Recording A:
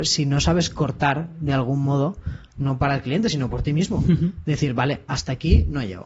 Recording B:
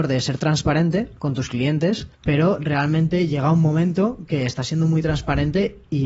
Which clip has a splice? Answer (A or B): B